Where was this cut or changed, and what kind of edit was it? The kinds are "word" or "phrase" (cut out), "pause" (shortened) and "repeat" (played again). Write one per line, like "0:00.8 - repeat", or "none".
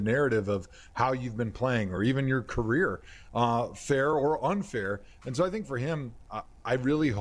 none